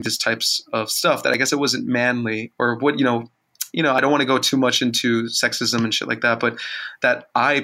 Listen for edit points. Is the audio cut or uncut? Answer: cut